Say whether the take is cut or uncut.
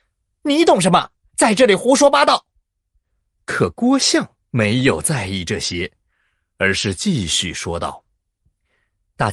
uncut